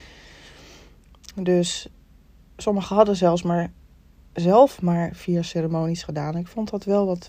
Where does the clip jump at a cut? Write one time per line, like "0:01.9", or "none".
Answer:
none